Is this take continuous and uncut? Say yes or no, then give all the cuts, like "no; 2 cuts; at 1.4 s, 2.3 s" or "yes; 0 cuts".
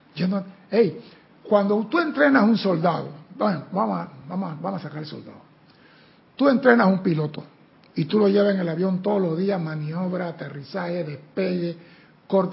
yes; 0 cuts